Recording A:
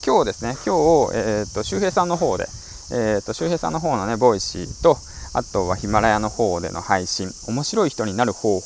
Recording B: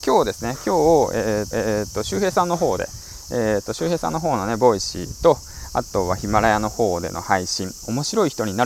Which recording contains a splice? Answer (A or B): B